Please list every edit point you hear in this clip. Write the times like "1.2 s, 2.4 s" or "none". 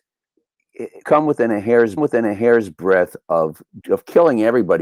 1.0 s, 2.0 s, 3.8 s

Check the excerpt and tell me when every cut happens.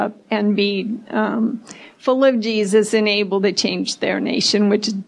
none

